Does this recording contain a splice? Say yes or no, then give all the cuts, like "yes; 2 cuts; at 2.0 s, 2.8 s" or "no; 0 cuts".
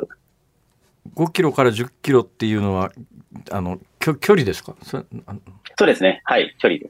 yes; 2 cuts; at 3.9 s, 5.7 s